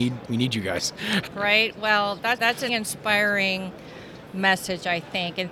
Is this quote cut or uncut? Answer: cut